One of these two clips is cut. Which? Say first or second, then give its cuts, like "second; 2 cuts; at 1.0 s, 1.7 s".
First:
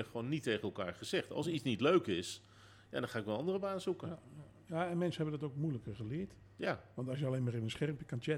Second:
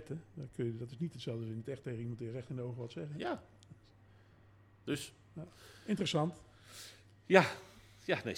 first; 1 cut; at 6.4 s